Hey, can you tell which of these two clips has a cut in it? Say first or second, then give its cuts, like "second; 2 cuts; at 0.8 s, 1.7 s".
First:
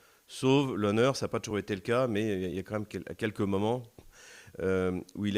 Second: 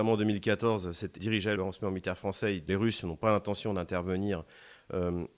second; 3 cuts; at 1.2 s, 1.6 s, 2.7 s